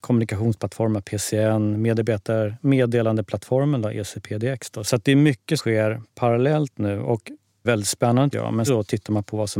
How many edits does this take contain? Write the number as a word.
four